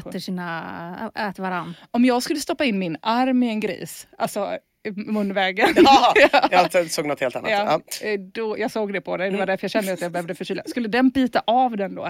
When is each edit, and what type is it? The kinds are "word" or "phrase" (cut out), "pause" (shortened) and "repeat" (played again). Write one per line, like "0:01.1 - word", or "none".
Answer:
none